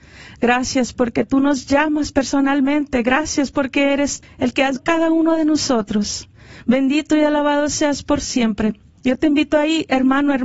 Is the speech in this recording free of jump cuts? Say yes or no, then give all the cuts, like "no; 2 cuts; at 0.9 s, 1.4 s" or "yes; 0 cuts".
no; 2 cuts; at 4.2 s, 4.8 s